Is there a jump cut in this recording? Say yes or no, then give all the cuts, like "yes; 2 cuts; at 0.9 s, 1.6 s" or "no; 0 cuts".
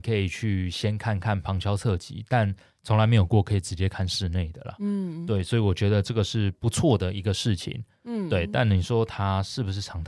no; 0 cuts